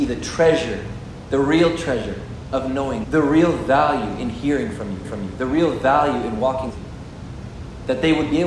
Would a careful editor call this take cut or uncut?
cut